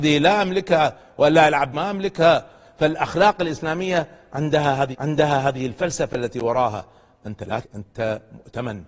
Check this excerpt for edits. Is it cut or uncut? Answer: cut